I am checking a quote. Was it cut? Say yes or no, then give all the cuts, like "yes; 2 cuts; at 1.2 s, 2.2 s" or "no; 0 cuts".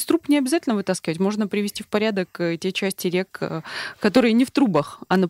no; 0 cuts